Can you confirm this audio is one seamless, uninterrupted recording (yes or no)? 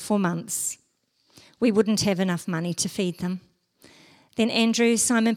yes